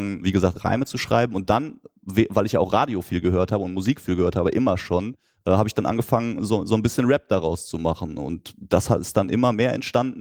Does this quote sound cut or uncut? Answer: uncut